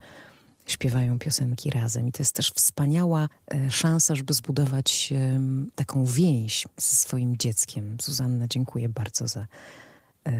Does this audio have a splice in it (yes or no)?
yes